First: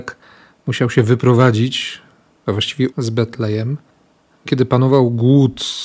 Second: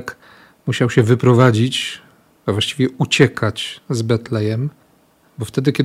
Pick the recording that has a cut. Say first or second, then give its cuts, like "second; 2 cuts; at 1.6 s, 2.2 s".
first; 2 cuts; at 2.9 s, 4.5 s